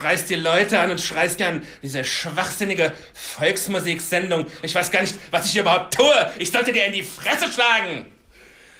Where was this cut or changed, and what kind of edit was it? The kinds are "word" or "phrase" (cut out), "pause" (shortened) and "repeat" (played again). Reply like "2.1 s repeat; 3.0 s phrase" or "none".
1.4 s word